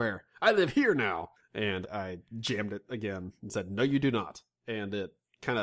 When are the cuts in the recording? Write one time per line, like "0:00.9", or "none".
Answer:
0:01.8

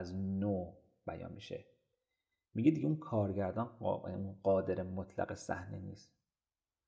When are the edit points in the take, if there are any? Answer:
none

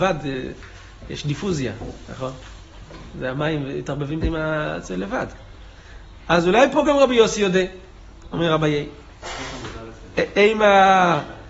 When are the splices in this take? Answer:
0:04.2

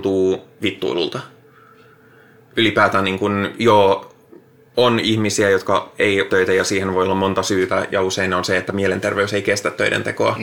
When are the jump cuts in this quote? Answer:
0:06.3

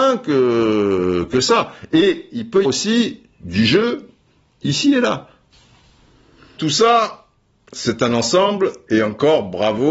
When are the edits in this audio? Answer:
0:02.6
0:06.6

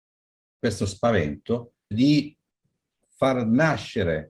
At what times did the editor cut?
0:01.9

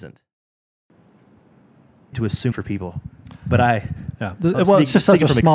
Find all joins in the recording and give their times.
0:02.1
0:02.5

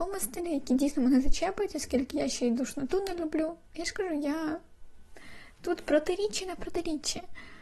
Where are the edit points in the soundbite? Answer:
none

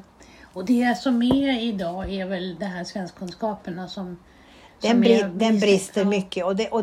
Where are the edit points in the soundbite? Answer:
none

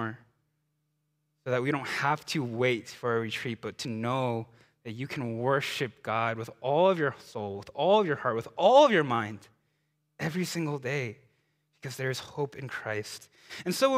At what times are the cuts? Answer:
none

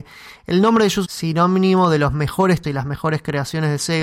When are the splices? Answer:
0:01.0
0:02.6

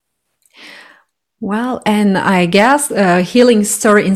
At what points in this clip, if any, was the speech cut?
0:02.9

